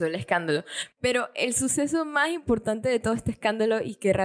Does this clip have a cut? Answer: no; 0 cuts

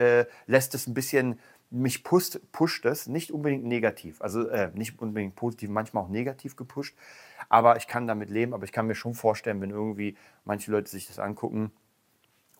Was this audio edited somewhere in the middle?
no; 0 cuts

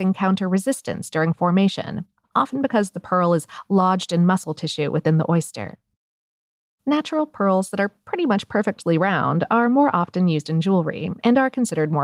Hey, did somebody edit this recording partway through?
no; 0 cuts

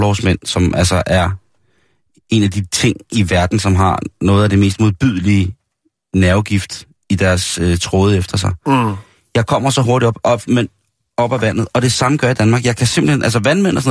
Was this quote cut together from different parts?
no; 0 cuts

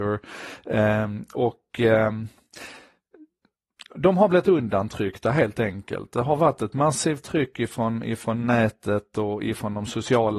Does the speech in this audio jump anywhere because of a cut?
no; 0 cuts

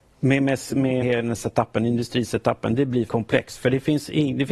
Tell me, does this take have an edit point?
yes; 2 cuts; at 1.0 s, 3.1 s

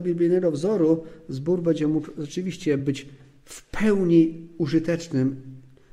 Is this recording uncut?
yes; 0 cuts

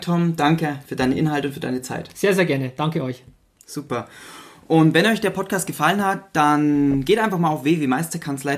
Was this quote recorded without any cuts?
yes; 0 cuts

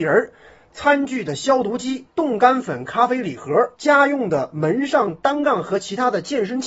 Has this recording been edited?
yes; 2 cuts; at 2.1 s, 3.7 s

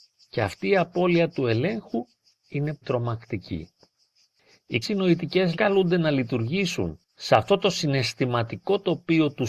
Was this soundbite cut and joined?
yes; 3 cuts; at 2.8 s, 4.8 s, 5.5 s

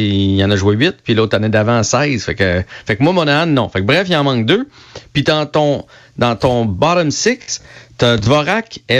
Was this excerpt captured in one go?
yes; 0 cuts

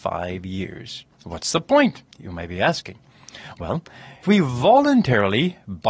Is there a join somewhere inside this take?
yes; 3 cuts; at 1.1 s, 2.1 s, 4.2 s

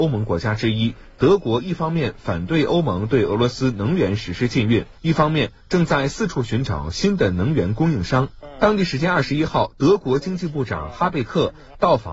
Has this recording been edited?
yes; 1 cut; at 5.0 s

